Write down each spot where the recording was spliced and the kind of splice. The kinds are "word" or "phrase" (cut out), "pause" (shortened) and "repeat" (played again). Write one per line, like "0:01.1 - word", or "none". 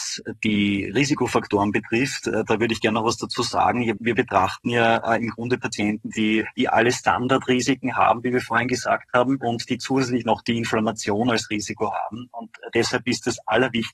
0:04.0 - word